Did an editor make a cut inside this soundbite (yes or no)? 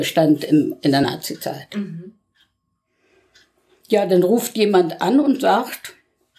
no